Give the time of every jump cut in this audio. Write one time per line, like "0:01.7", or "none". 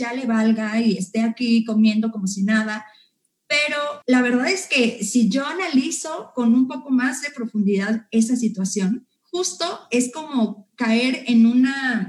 0:04.0
0:09.2